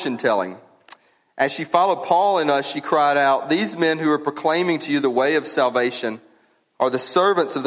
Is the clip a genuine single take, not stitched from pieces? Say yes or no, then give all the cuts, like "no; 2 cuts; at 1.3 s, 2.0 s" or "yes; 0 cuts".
yes; 0 cuts